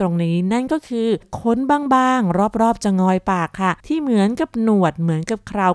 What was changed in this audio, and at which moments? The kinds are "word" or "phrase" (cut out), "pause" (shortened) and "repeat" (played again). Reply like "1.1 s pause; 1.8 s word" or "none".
3.8 s pause